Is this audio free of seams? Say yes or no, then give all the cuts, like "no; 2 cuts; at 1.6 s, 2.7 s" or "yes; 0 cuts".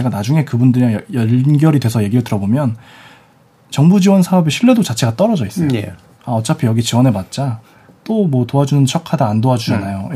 yes; 0 cuts